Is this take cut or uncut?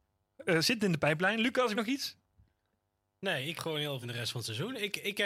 cut